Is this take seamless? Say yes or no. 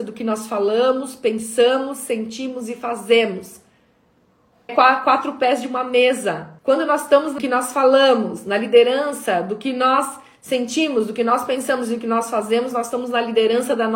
no